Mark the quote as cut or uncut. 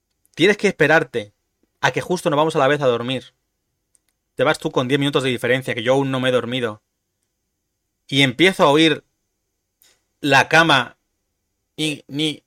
uncut